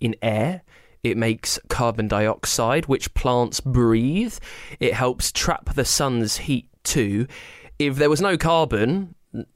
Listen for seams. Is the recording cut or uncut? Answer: uncut